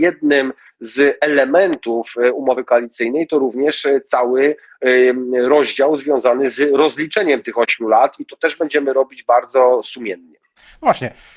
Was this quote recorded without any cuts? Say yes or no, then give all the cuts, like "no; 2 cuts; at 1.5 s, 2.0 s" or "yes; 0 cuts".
yes; 0 cuts